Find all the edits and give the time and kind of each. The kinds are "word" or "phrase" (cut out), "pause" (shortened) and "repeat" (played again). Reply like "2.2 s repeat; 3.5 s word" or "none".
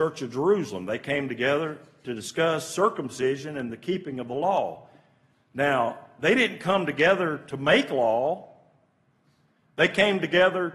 none